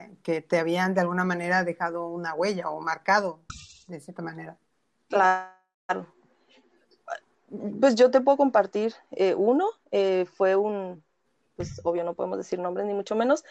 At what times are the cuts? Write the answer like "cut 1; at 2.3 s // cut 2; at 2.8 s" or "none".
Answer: none